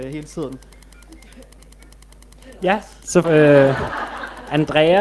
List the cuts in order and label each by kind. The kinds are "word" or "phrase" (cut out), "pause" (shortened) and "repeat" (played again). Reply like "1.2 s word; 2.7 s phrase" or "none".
3.2 s word

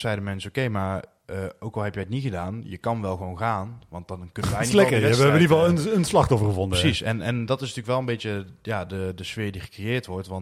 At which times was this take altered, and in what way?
none

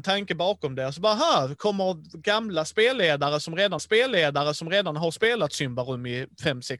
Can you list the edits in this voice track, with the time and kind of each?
3.8 s repeat

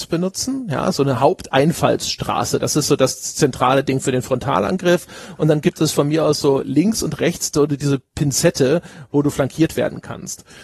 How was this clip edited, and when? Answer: none

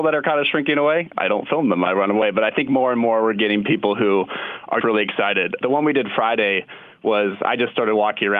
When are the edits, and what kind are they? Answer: 4.8 s word

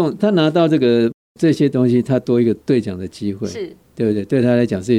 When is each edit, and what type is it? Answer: 2.6 s pause

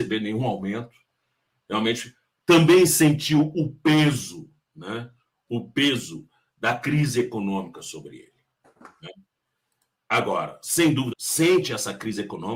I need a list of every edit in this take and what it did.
11.1 s word

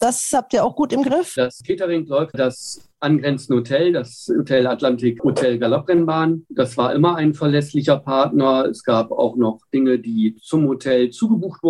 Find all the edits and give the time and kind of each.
2.3 s word

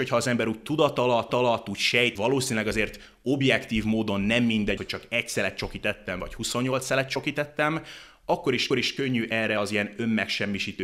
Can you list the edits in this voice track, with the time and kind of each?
1.3 s repeat; 2.2 s word; 4.8 s word; 8.7 s repeat

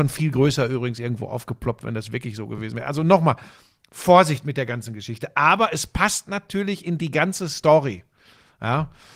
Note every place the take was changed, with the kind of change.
none

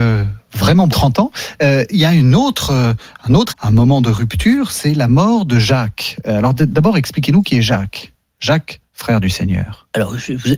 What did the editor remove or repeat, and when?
0.9 s word; 3.5 s phrase

